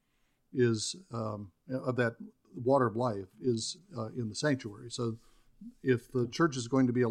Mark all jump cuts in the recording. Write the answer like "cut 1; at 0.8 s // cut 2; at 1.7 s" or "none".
none